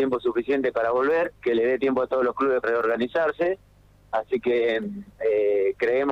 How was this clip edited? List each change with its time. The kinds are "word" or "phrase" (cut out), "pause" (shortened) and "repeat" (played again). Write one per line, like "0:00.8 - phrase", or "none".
0:01.3 - pause
0:02.6 - word